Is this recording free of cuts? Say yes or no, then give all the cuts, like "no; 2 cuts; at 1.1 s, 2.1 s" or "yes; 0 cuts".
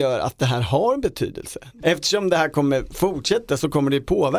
yes; 0 cuts